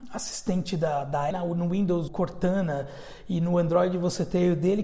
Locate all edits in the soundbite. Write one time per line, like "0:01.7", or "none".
0:01.3
0:02.1